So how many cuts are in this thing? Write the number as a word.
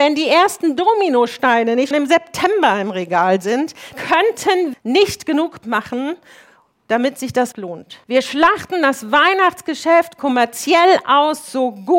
six